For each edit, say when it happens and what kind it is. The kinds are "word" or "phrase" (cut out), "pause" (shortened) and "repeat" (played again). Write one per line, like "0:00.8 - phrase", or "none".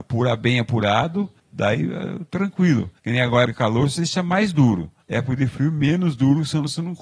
0:01.4 - pause
0:03.0 - pause
0:03.5 - word
0:05.0 - pause